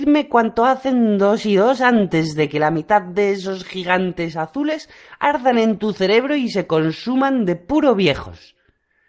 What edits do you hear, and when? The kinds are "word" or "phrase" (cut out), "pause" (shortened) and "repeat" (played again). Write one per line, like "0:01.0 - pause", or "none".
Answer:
none